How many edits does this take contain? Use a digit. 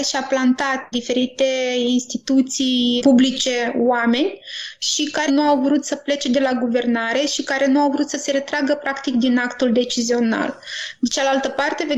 3